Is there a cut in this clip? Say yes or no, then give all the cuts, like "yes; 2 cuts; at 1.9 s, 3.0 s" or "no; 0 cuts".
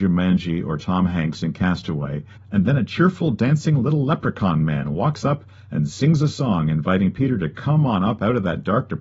no; 0 cuts